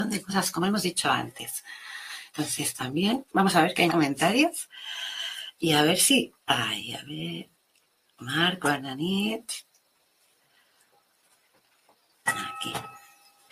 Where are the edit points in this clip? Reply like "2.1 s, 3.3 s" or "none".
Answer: 3.3 s, 3.9 s, 6.4 s